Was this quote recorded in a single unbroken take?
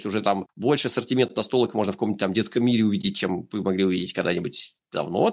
yes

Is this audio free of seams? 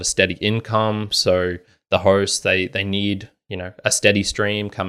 yes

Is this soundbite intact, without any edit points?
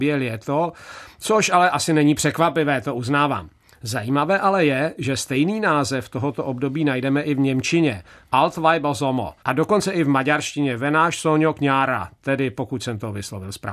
no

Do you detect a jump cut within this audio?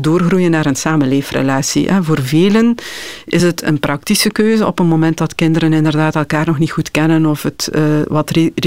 no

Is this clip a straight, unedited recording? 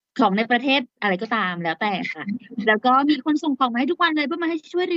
no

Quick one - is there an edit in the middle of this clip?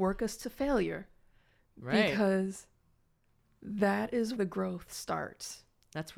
yes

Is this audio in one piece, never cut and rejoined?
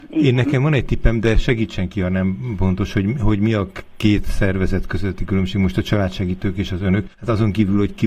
no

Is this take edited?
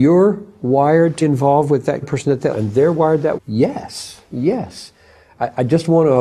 yes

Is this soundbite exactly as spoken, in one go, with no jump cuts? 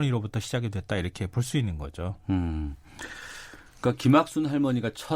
yes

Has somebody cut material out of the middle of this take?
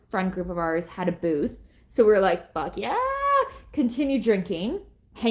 no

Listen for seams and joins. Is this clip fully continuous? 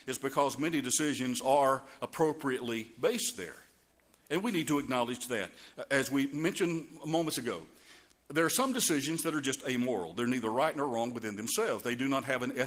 yes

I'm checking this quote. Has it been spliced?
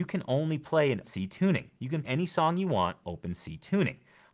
yes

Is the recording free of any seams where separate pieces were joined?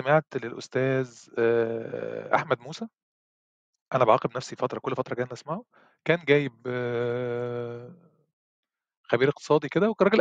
yes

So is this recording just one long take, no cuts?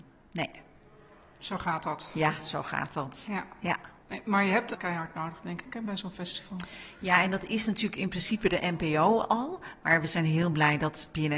no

